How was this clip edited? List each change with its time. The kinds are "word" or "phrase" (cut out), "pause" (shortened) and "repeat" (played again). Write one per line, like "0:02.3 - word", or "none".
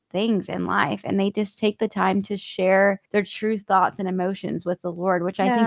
0:03.1 - pause

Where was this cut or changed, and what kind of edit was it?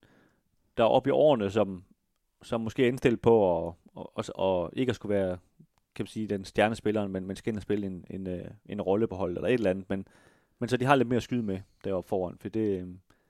none

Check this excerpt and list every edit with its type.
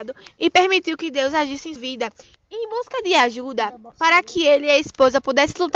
0:01.8 - word
0:02.3 - pause

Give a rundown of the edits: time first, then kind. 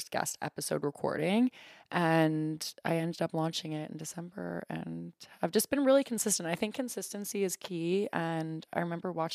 none

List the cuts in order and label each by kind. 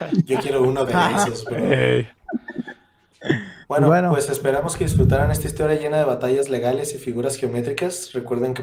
0:03.6 - pause

